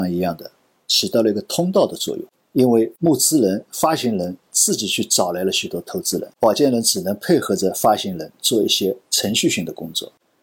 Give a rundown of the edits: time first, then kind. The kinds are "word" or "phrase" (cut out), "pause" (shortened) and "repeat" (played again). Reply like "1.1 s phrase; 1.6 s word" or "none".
none